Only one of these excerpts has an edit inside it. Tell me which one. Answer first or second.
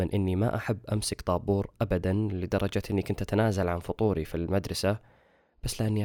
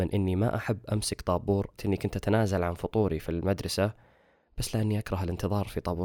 second